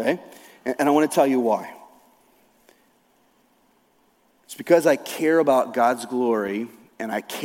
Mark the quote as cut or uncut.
uncut